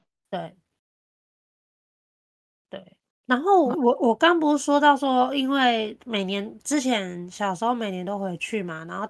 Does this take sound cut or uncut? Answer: cut